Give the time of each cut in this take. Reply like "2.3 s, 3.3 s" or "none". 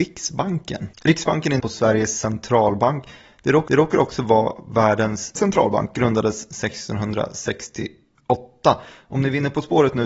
0.9 s, 1.6 s, 3.7 s, 5.4 s